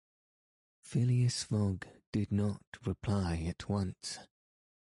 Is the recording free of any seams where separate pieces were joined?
yes; 0 cuts

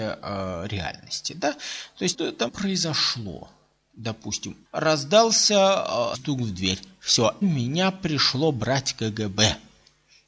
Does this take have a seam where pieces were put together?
yes; 5 cuts; at 2.1 s, 2.5 s, 4.6 s, 6.1 s, 7.4 s

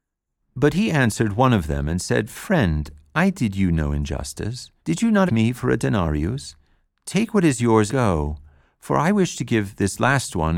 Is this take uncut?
no; 3 cuts; at 4.8 s, 5.3 s, 7.9 s

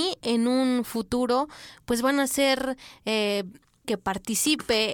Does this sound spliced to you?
yes; 1 cut; at 3.8 s

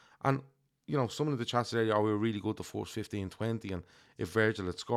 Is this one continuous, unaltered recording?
yes; 0 cuts

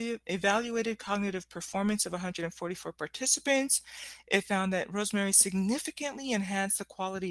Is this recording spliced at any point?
no; 0 cuts

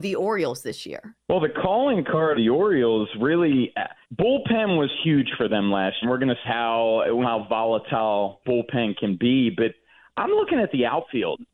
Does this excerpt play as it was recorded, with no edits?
no; 7 cuts; at 1.2 s, 2.3 s, 4.0 s, 6.0 s, 6.4 s, 7.2 s, 8.4 s

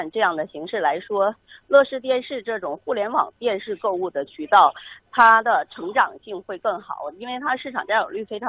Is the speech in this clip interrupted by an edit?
no; 0 cuts

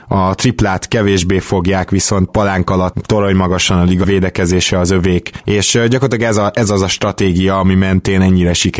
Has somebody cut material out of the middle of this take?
yes; 3 cuts; at 2.3 s, 2.9 s, 4.0 s

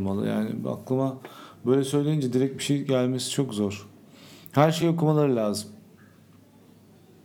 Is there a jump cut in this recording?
no; 0 cuts

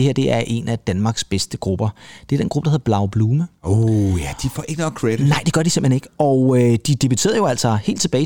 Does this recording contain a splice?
no; 0 cuts

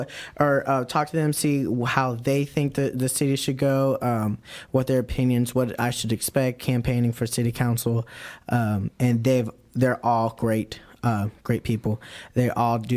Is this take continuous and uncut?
yes; 0 cuts

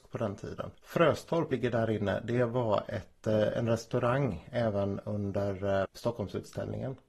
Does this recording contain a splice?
yes; 2 cuts; at 1.5 s, 5.8 s

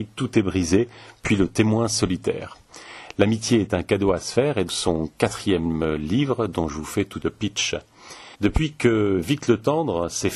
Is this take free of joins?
no; 3 cuts; at 4.7 s, 7.2 s, 8.3 s

